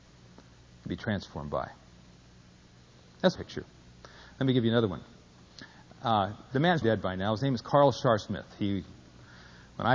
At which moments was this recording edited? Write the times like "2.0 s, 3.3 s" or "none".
3.4 s, 6.8 s